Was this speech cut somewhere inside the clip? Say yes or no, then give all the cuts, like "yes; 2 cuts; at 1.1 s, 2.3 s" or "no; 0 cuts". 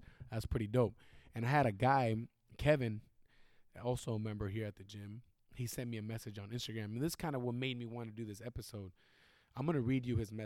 no; 0 cuts